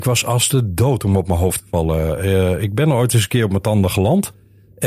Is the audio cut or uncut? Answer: uncut